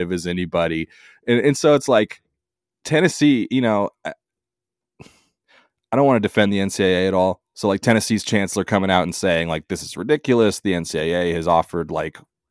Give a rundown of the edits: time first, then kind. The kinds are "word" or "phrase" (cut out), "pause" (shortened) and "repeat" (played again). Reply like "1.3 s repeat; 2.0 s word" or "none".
none